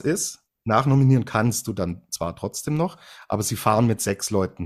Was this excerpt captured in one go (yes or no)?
yes